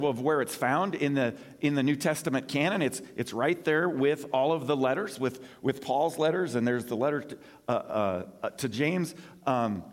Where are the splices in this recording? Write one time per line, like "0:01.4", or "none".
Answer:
none